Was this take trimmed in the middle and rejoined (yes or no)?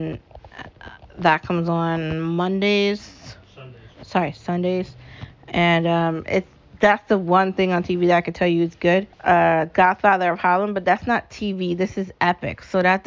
yes